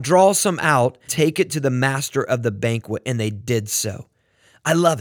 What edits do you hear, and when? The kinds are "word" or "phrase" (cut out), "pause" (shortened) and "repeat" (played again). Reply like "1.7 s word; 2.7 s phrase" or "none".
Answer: 1.1 s word